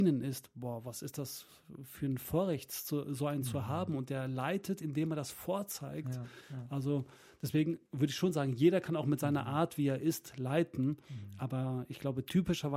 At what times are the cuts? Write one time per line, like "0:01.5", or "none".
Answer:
none

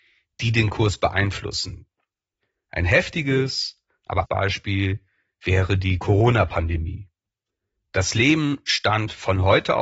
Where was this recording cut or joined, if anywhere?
0:04.2

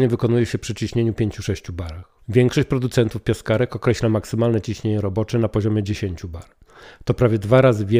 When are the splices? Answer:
0:02.2

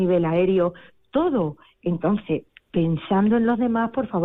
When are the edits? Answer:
0:02.5

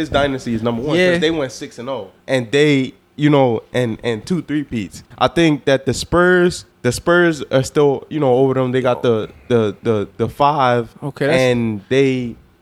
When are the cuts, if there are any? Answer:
0:02.2
0:05.1
0:06.7

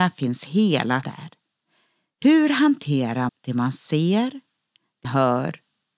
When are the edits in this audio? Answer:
0:01.0
0:03.3
0:05.0

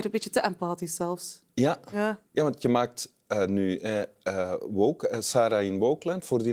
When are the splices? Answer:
0:02.3

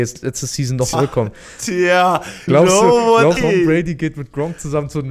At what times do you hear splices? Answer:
0:00.9
0:02.5
0:03.4

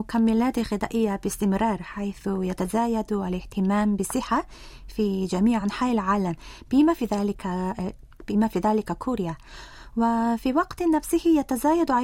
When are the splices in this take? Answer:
none

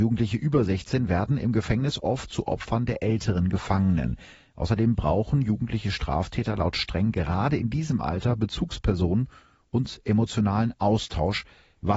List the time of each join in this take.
none

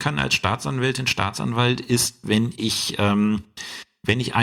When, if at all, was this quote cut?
none

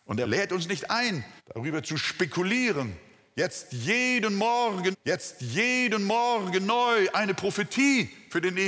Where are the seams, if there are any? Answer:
0:01.4
0:04.9

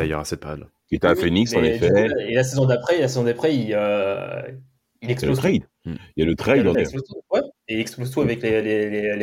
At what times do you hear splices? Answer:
0:05.7
0:06.7

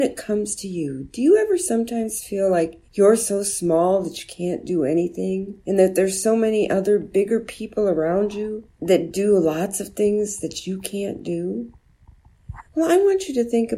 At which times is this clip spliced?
0:02.8
0:05.6
0:08.7
0:12.7

